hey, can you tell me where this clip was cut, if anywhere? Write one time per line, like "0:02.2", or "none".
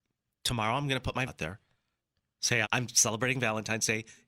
0:01.3
0:02.6